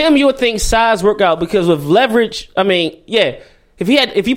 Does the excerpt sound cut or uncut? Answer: uncut